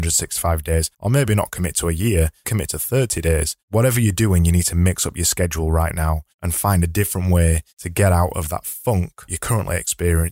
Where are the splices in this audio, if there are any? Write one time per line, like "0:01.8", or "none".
0:00.9
0:02.4
0:03.6
0:06.3
0:07.7
0:09.3